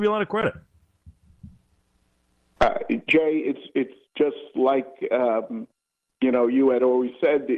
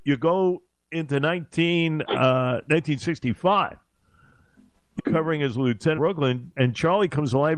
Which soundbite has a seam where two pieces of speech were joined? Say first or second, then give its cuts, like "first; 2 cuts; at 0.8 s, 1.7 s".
second; 2 cuts; at 5.0 s, 6.0 s